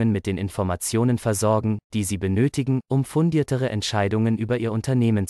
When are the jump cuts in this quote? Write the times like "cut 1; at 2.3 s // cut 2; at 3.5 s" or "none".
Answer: none